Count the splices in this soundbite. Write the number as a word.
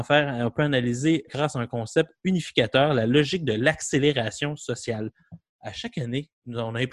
one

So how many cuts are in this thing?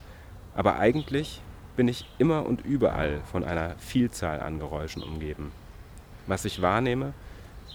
zero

